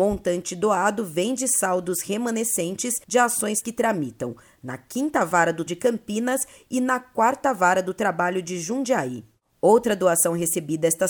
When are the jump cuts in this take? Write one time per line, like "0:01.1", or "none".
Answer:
0:03.0
0:03.6
0:05.7